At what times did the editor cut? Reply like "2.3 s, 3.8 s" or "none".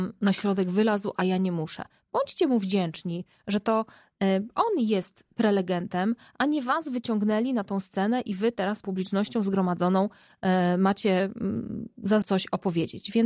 8.8 s, 12.2 s